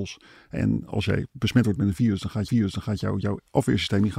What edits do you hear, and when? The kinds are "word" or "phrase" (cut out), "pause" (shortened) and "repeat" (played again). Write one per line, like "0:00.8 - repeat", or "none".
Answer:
0:02.5 - repeat